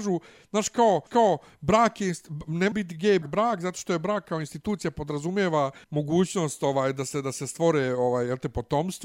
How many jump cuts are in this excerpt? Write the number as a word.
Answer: four